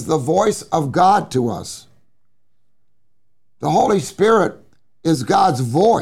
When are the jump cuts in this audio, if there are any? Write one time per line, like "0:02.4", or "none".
none